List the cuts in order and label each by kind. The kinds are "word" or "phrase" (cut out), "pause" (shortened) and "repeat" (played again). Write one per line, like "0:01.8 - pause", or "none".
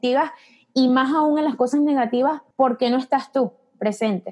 0:02.5 - pause